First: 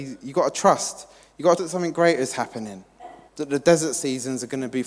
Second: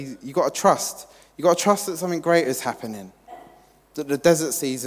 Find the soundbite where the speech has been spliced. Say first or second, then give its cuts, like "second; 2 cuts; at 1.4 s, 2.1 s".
first; 2 cuts; at 1.6 s, 3.3 s